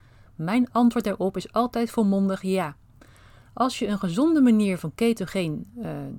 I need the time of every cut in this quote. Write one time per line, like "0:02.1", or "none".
none